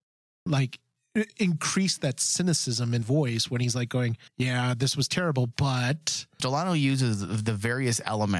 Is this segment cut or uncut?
cut